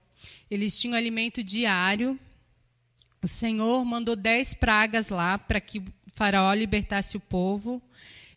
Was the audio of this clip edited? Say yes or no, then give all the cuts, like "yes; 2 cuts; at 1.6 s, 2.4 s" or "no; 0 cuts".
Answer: no; 0 cuts